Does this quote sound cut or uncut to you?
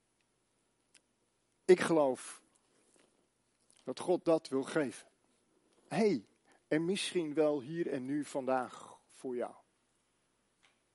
uncut